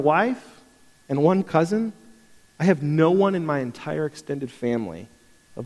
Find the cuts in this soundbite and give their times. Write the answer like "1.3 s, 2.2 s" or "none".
none